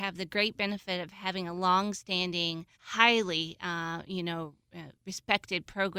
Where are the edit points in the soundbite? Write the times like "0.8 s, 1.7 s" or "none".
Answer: 2.7 s, 5.0 s